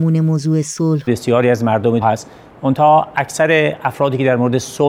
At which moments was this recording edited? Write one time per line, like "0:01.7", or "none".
0:01.1
0:02.0